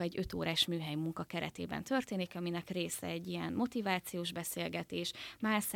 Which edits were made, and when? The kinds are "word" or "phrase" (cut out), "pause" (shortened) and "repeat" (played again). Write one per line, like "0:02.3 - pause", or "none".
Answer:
none